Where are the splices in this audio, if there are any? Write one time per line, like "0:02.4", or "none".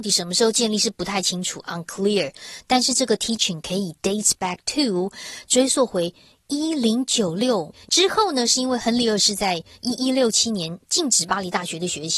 none